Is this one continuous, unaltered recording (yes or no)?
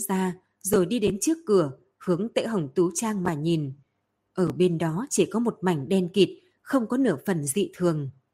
yes